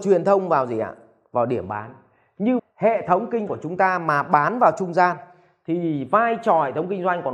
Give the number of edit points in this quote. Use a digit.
2